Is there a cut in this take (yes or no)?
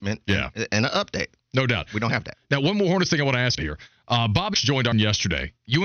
yes